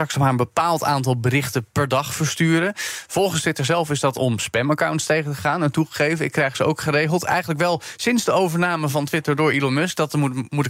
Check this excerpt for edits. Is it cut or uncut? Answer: uncut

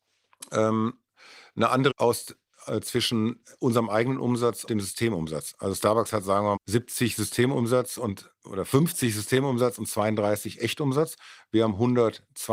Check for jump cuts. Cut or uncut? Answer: cut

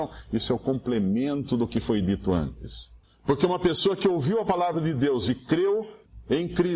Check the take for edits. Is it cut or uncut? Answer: uncut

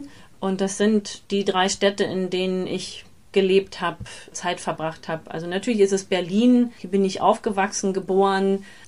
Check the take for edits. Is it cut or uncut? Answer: cut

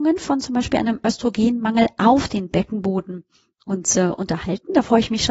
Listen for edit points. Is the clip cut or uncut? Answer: uncut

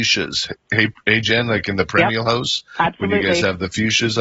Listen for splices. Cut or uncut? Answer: uncut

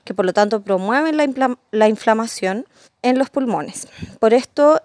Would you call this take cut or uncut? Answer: cut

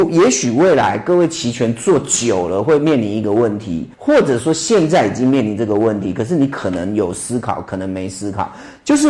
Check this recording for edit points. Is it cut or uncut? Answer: cut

